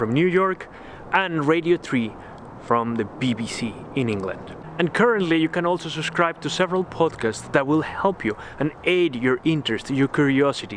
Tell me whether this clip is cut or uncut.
uncut